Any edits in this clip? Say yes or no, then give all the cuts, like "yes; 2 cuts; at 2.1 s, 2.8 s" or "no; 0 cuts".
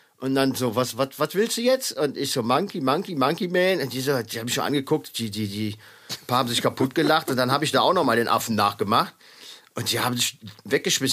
no; 0 cuts